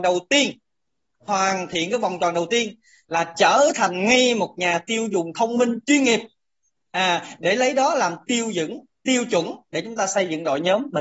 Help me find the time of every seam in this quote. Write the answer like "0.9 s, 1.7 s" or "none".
none